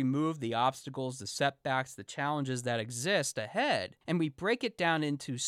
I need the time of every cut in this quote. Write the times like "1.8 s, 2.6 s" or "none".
4.0 s